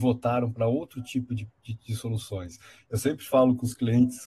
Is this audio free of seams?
yes; 0 cuts

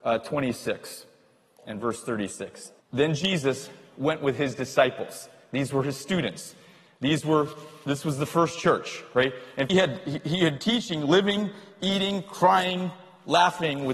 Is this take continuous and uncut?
no; 3 cuts; at 2.8 s, 9.7 s, 10.6 s

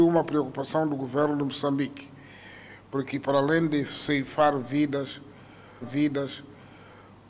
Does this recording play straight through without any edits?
no; 1 cut; at 5.8 s

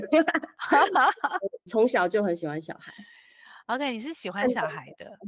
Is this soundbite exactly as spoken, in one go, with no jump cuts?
no; 1 cut; at 1.7 s

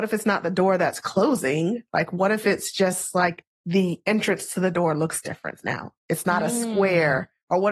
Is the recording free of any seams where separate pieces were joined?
yes; 0 cuts

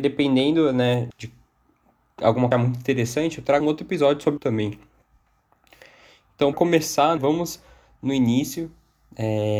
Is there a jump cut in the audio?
yes; 6 cuts; at 1.1 s, 2.5 s, 3.6 s, 4.4 s, 6.5 s, 7.2 s

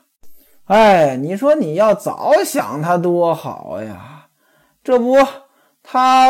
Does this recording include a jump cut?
no; 0 cuts

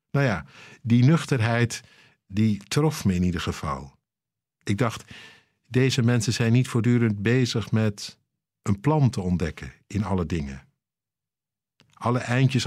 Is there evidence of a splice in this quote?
no; 0 cuts

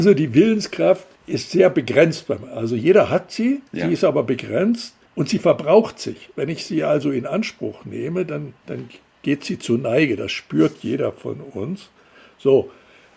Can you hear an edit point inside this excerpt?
yes; 4 cuts; at 1.1 s, 3.7 s, 5.0 s, 8.6 s

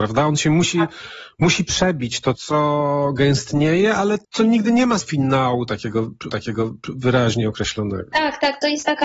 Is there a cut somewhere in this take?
yes; 4 cuts; at 2.4 s, 4.2 s, 5.0 s, 6.3 s

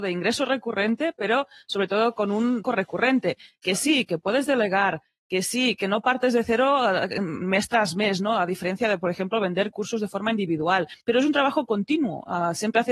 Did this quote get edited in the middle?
yes; 2 cuts; at 2.6 s, 11.0 s

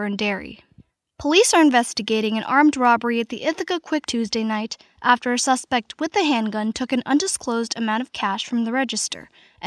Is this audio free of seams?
no; 1 cut; at 4.0 s

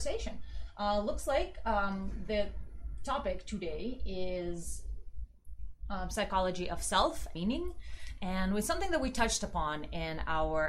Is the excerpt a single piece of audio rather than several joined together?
no; 1 cut; at 7.3 s

